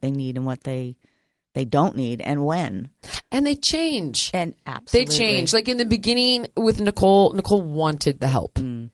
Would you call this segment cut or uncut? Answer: uncut